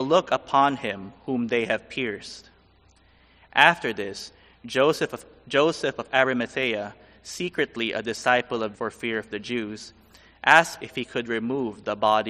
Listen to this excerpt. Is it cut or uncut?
cut